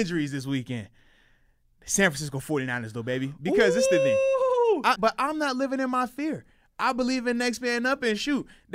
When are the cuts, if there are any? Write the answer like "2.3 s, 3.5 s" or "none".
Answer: 5.0 s